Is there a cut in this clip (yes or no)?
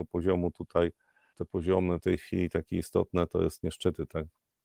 yes